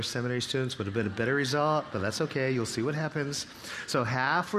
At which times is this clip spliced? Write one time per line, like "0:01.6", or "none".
none